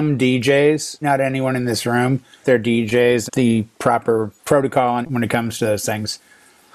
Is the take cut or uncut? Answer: cut